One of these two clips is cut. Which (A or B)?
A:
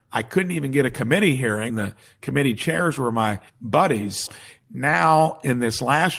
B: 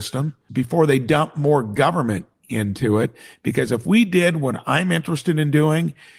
A